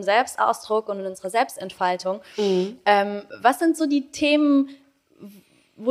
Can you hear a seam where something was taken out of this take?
no; 0 cuts

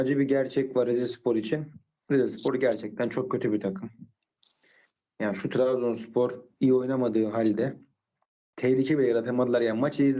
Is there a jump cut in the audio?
no; 0 cuts

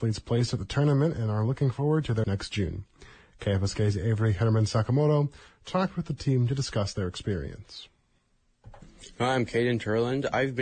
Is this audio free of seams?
no; 1 cut; at 2.2 s

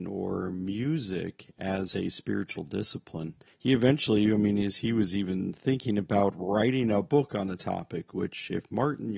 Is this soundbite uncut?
yes; 0 cuts

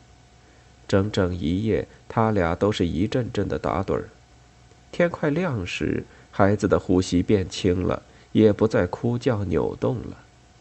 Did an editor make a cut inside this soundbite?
no; 0 cuts

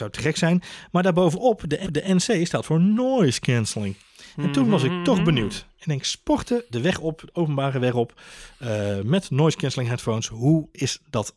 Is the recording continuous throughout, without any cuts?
no; 2 cuts; at 1.8 s, 6.7 s

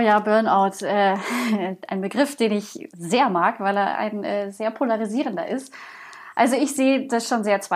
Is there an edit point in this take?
no; 0 cuts

